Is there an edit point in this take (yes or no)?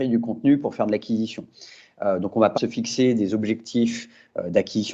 yes